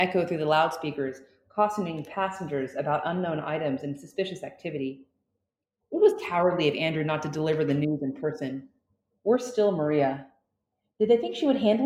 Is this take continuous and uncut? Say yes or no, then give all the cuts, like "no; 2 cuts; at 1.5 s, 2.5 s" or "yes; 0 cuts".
yes; 0 cuts